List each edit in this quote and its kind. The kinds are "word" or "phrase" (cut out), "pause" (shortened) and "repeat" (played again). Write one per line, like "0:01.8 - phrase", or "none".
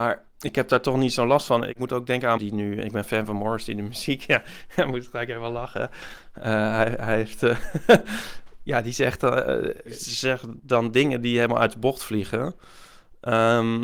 0:02.4 - phrase